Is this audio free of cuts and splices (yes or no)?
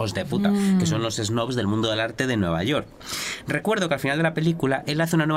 yes